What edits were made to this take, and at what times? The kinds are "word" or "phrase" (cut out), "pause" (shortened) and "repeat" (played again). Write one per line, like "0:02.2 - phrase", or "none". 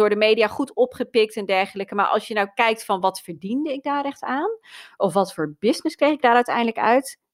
none